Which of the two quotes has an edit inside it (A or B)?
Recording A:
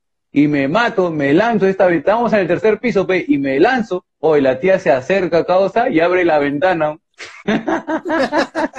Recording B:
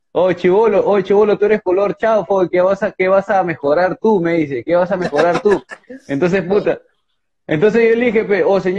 A